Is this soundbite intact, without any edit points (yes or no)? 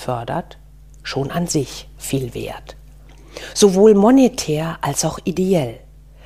yes